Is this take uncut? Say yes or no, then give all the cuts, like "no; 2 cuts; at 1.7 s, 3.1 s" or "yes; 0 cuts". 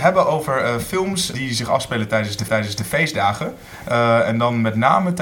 no; 2 cuts; at 1.3 s, 2.5 s